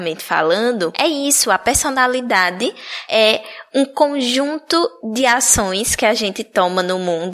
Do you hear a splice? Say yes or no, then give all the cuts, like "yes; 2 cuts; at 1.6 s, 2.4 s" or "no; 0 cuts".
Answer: no; 0 cuts